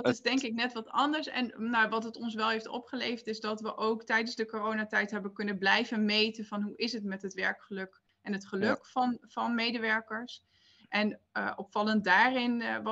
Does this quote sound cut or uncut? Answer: uncut